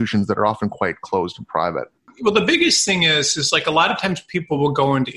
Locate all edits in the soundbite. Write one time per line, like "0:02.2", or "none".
none